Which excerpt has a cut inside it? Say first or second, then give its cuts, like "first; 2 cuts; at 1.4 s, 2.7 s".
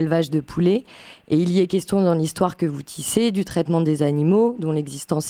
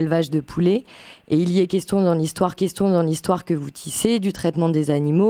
second; 1 cut; at 2.6 s